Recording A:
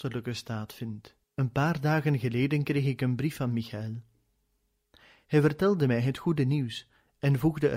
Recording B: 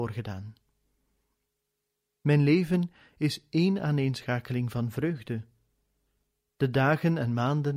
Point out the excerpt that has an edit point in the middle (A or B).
A